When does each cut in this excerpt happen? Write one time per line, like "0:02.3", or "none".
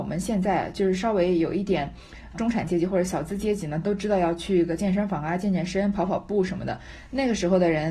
0:02.3